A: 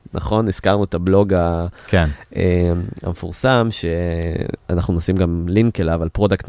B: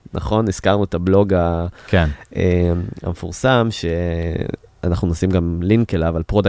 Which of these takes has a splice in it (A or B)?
A